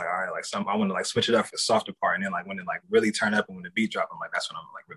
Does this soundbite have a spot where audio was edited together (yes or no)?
yes